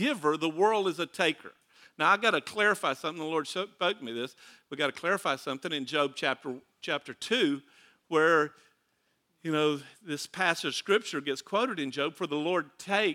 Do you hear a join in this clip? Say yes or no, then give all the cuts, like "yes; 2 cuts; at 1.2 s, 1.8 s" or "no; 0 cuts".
no; 0 cuts